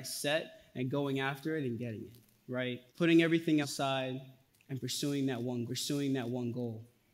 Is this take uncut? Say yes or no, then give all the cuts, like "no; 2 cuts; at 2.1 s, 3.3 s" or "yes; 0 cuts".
no; 4 cuts; at 2.9 s, 3.6 s, 4.5 s, 5.7 s